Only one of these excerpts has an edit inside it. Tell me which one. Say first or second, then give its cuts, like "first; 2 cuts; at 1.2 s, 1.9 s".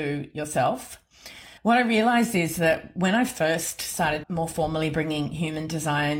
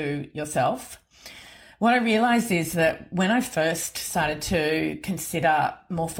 first; 2 cuts; at 1.6 s, 4.2 s